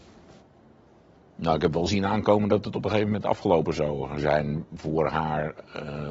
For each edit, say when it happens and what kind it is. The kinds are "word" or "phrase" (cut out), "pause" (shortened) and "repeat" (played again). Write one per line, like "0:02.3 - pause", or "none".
none